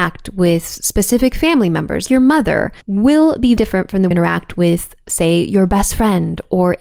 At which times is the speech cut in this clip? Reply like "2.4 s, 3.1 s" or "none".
2.1 s, 2.8 s, 3.6 s, 4.1 s